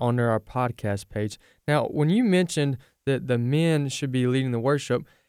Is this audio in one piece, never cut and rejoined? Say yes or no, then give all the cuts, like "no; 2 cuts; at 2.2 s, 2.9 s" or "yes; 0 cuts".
yes; 0 cuts